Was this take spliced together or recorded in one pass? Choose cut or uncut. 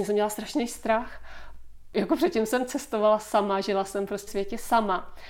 cut